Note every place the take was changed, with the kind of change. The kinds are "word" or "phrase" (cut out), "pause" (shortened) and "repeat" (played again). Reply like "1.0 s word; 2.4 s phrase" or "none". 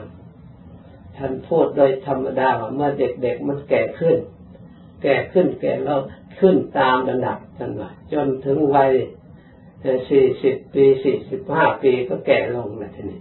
7.5 s pause